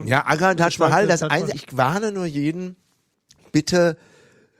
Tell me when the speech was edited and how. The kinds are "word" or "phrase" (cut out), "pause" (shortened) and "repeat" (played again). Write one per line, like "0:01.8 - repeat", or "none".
0:01.5 - word
0:03.1 - pause